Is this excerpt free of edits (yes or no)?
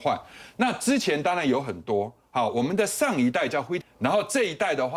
no